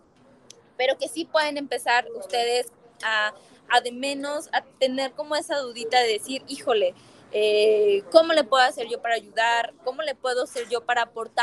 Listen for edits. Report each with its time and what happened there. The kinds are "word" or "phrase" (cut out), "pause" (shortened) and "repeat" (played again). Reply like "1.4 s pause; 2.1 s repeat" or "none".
none